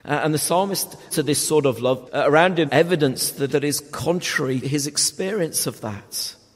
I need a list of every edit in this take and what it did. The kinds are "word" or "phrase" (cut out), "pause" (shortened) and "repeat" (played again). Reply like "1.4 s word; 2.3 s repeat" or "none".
1.1 s word; 2.1 s word; 2.7 s word; 3.5 s word; 4.6 s word